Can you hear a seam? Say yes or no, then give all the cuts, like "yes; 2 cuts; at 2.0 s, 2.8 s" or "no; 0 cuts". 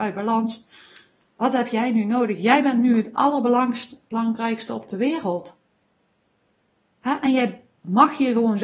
no; 0 cuts